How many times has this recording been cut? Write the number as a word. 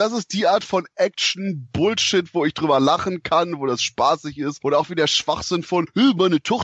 zero